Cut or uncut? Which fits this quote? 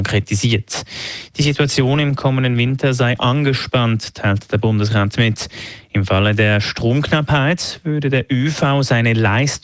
uncut